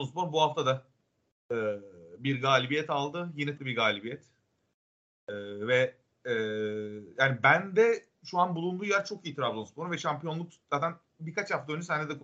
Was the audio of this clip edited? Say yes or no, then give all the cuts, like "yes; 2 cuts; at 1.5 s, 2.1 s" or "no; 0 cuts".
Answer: yes; 1 cut; at 3.6 s